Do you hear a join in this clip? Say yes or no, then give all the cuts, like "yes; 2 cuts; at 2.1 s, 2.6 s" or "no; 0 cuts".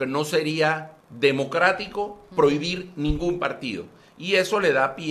yes; 1 cut; at 1.0 s